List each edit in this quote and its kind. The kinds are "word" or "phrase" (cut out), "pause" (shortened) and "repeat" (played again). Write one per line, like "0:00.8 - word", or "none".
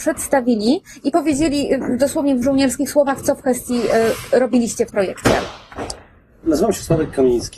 0:02.4 - word
0:04.9 - word